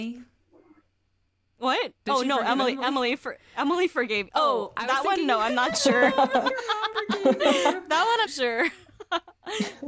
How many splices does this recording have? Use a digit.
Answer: 1